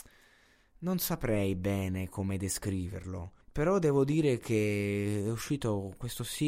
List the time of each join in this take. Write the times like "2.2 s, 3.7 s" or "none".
3.4 s